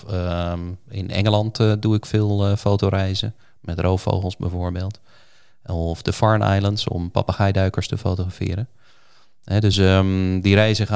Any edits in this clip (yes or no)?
no